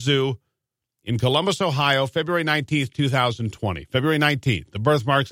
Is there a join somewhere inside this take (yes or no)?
no